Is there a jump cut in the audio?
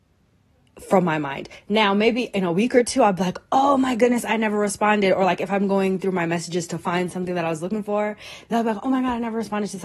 no; 0 cuts

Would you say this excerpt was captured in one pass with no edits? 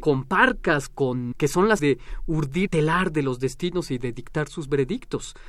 no; 3 cuts; at 1.3 s, 1.8 s, 2.7 s

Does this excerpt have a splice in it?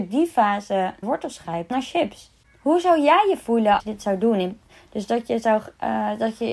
yes; 3 cuts; at 1.0 s, 1.7 s, 3.8 s

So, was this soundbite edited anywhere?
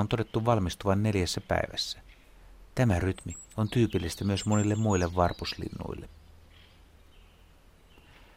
no; 0 cuts

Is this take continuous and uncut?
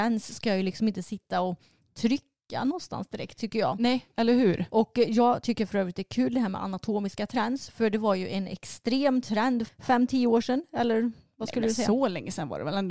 no; 1 cut; at 9.7 s

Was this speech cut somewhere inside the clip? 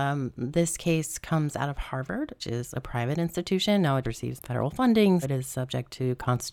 yes; 4 cuts; at 2.4 s, 4.0 s, 4.4 s, 5.2 s

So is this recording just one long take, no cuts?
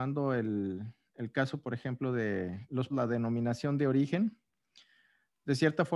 no; 1 cut; at 2.9 s

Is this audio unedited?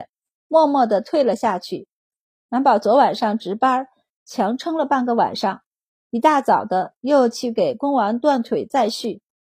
yes; 0 cuts

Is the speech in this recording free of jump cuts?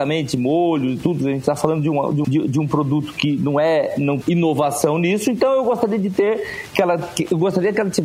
no; 2 cuts; at 2.2 s, 4.2 s

